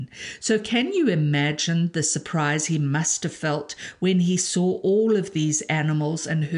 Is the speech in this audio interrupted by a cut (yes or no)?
no